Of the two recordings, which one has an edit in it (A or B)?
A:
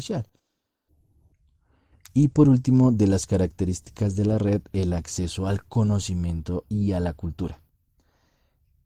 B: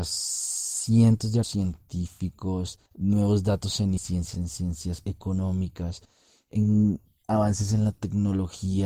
B